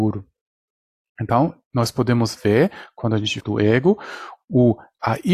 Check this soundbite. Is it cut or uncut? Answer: cut